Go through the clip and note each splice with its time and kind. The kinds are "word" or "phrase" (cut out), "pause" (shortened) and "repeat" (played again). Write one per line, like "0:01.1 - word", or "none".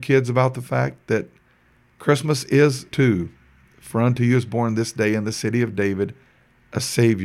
0:02.9 - word